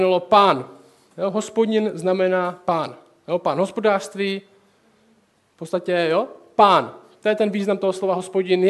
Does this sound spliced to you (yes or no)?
no